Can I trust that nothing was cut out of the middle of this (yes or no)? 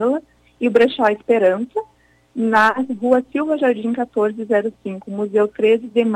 yes